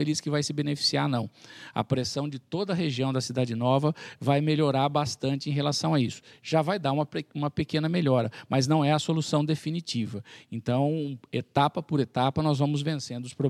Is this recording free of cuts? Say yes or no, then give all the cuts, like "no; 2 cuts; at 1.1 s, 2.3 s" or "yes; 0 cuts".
yes; 0 cuts